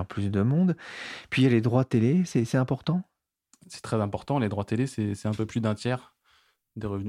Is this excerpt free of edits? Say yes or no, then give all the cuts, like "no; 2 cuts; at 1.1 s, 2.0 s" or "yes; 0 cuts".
yes; 0 cuts